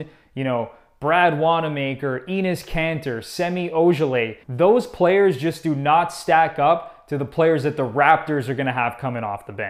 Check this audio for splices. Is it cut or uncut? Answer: cut